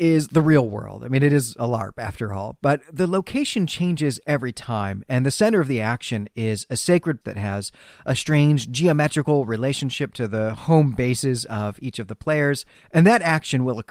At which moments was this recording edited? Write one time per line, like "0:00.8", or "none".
0:07.2
0:12.7